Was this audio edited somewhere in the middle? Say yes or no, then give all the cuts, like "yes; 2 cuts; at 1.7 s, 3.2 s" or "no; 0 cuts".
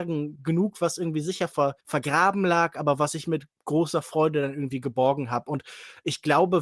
yes; 1 cut; at 1.8 s